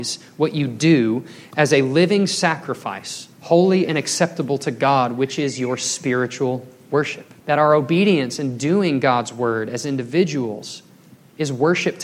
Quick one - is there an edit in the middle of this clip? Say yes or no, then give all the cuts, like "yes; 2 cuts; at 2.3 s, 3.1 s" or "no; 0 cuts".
yes; 2 cuts; at 3.3 s, 7.4 s